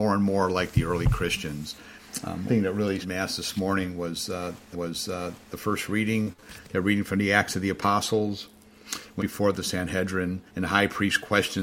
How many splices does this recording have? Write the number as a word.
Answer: five